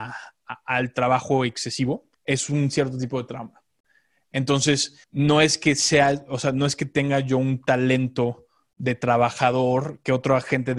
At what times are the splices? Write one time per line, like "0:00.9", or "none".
0:02.1
0:05.0

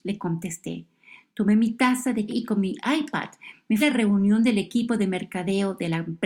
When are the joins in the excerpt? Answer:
0:02.3
0:03.8

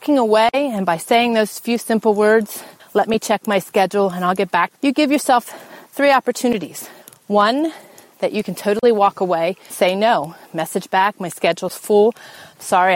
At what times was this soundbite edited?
0:02.8
0:04.7
0:05.9
0:07.0
0:09.7

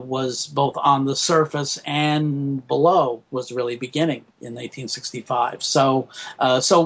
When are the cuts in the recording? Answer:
0:03.3
0:04.3

